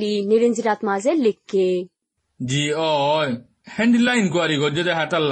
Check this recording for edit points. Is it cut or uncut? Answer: uncut